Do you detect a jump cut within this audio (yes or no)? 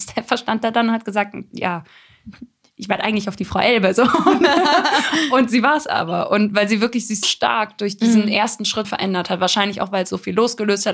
yes